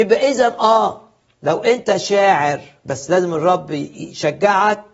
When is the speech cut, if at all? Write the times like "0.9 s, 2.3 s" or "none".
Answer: none